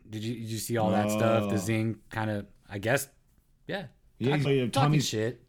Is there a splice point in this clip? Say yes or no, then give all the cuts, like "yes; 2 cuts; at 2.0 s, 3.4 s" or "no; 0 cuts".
yes; 1 cut; at 4.4 s